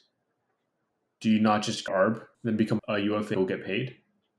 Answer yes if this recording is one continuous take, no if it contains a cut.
no